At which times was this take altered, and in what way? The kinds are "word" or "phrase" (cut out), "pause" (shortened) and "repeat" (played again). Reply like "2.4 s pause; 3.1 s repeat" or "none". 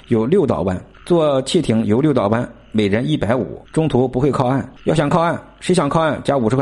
0.9 s pause; 3.7 s pause; 4.8 s pause